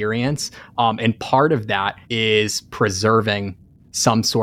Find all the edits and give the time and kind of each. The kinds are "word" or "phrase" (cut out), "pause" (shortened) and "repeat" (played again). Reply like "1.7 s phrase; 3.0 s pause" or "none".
2.0 s pause